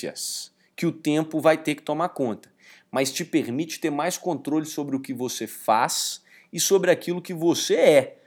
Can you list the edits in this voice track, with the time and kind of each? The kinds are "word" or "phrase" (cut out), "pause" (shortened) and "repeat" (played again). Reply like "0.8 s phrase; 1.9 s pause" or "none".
none